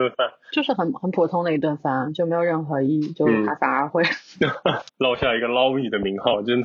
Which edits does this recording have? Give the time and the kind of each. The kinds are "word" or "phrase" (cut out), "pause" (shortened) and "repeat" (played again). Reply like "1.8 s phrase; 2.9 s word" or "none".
4.9 s pause